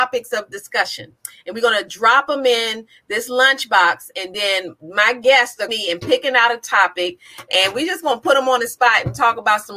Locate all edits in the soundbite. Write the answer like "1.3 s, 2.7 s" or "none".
5.7 s